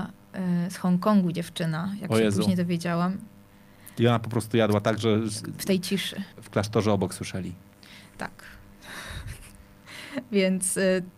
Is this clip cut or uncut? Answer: cut